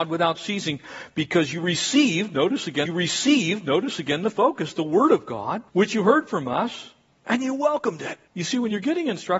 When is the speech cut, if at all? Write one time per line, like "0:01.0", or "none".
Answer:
0:02.9
0:05.7
0:08.3